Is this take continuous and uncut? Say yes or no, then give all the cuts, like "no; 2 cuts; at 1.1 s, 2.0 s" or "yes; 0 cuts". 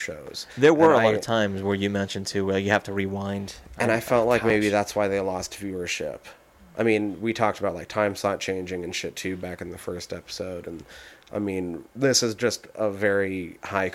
yes; 0 cuts